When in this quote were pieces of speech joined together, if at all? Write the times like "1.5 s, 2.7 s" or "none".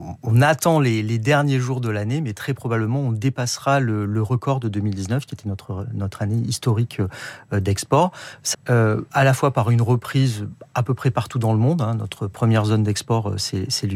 8.5 s